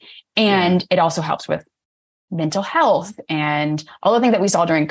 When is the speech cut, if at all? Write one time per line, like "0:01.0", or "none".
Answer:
none